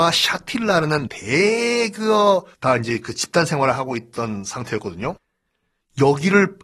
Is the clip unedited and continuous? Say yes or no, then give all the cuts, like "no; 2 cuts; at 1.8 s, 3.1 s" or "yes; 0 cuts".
no; 2 cuts; at 1.1 s, 2.5 s